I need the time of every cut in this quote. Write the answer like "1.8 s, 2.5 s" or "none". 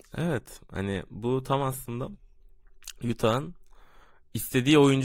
none